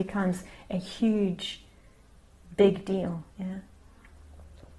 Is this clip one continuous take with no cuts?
no; 1 cut; at 3.3 s

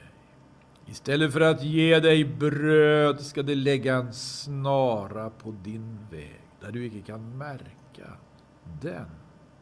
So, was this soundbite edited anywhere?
no; 0 cuts

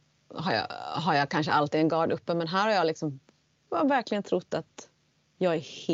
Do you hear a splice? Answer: no; 0 cuts

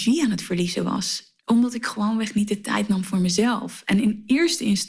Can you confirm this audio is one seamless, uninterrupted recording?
no; 1 cut; at 1.4 s

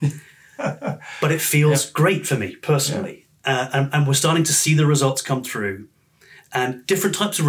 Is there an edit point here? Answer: no; 0 cuts

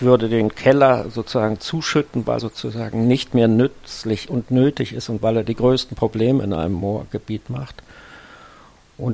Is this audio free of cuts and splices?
no; 1 cut; at 2.4 s

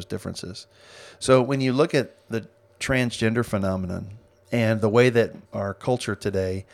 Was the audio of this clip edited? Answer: yes; 1 cut; at 5.5 s

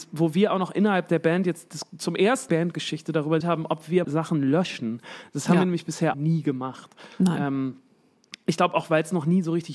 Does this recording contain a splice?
yes; 4 cuts; at 2.5 s, 3.4 s, 4.0 s, 6.1 s

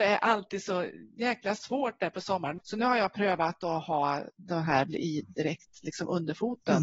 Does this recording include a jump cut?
yes; 1 cut; at 4.9 s

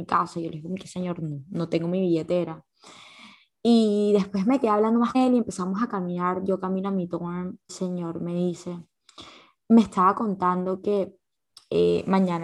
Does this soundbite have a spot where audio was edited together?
yes; 2 cuts; at 5.1 s, 7.7 s

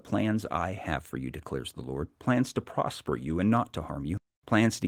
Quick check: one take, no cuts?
no; 1 cut; at 2.1 s

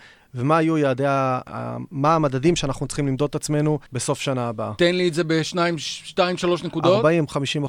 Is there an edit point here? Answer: yes; 1 cut; at 3.9 s

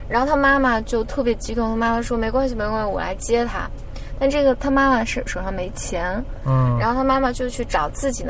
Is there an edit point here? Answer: no; 0 cuts

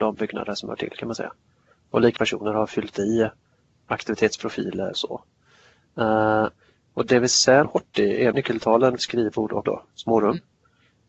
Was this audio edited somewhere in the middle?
yes; 6 cuts; at 2.2 s, 4.9 s, 7.6 s, 8.3 s, 9.0 s, 9.7 s

